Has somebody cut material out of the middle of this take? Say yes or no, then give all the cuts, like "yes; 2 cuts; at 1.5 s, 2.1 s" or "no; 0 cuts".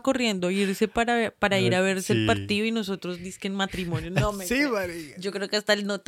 no; 0 cuts